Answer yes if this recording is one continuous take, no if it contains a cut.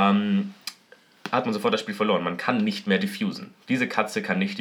yes